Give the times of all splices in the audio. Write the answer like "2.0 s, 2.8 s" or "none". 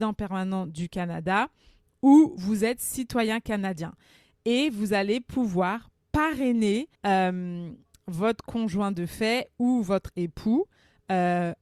6.9 s